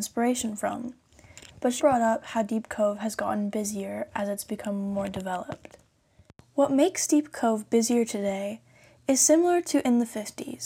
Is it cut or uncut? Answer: cut